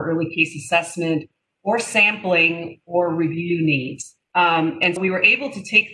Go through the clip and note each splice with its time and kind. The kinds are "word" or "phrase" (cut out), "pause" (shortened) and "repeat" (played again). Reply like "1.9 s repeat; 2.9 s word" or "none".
4.2 s pause; 5.0 s word